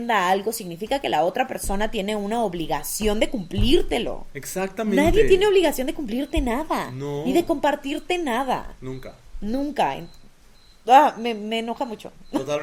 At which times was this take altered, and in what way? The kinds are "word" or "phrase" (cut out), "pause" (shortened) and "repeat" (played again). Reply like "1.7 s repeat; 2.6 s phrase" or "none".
none